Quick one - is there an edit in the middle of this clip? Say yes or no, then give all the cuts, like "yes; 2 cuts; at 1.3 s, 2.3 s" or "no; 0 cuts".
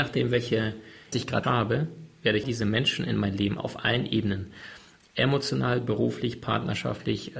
yes; 4 cuts; at 1.1 s, 1.4 s, 2.4 s, 3.6 s